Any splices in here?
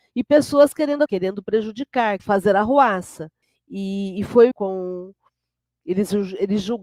yes; 4 cuts; at 1.1 s, 2.2 s, 3.4 s, 4.5 s

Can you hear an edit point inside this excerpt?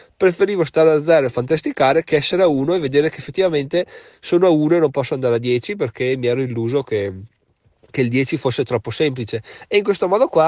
no; 0 cuts

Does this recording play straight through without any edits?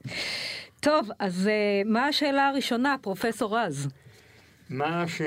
yes; 0 cuts

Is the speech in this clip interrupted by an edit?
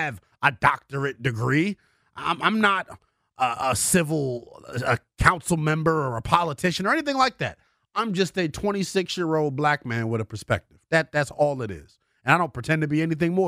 no; 0 cuts

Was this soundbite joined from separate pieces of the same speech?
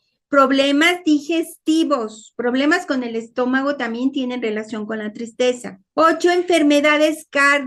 yes; 1 cut; at 5.9 s

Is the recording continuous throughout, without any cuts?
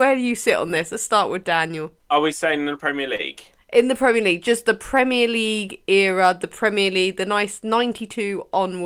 yes; 0 cuts

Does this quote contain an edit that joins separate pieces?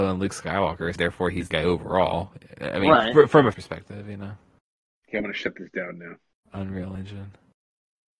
yes; 3 cuts; at 1.0 s, 1.5 s, 3.5 s

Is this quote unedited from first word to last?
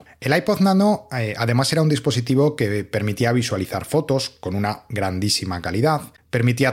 yes; 0 cuts

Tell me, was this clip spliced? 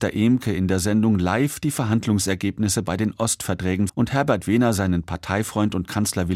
yes; 1 cut; at 3.9 s

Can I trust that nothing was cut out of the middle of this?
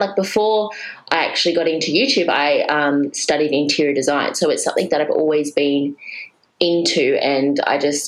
yes; 0 cuts

